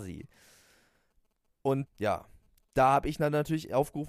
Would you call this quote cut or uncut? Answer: cut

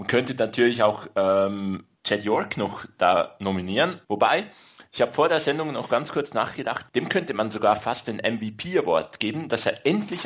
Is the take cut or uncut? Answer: cut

